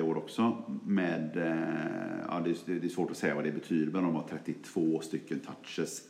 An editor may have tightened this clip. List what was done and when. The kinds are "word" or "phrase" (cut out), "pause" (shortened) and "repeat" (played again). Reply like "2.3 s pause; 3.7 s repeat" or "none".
none